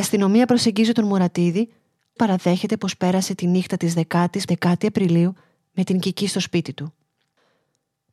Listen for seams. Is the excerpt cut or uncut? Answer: cut